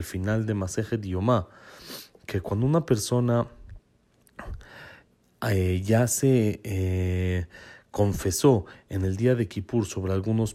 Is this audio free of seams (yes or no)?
yes